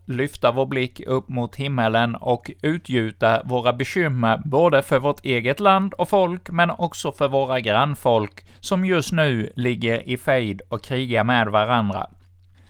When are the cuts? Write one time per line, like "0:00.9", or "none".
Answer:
0:08.6